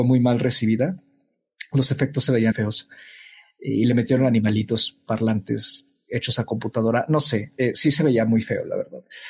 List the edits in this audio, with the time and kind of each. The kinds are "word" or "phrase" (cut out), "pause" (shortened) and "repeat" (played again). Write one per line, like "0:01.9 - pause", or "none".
0:02.5 - word